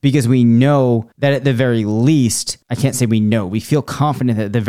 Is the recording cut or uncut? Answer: cut